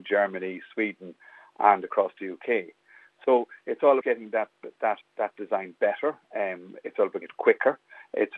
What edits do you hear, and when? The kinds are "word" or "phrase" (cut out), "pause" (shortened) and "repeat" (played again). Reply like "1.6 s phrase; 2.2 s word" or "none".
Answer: 4.0 s word; 5.0 s word; 7.2 s word